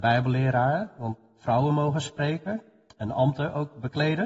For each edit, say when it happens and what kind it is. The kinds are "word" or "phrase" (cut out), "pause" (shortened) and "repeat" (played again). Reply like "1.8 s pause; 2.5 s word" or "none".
none